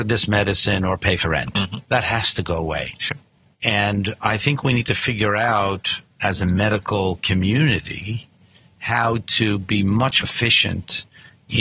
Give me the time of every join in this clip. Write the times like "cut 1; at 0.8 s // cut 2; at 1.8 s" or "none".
cut 1; at 1.2 s // cut 2; at 10.2 s